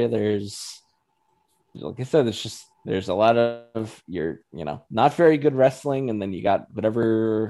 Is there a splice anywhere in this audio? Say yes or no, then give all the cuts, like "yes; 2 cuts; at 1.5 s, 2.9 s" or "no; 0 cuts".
no; 0 cuts